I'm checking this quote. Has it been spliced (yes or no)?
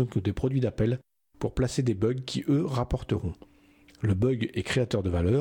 no